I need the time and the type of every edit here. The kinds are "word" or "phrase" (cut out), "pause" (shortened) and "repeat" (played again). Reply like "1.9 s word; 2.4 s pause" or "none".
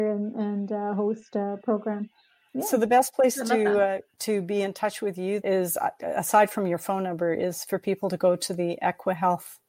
5.4 s word